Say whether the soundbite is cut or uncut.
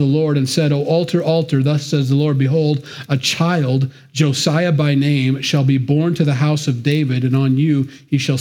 uncut